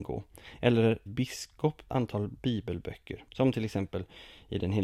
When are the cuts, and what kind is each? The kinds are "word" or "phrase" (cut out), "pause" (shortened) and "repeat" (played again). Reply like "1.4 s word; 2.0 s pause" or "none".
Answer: 1.1 s phrase; 1.9 s word; 3.3 s pause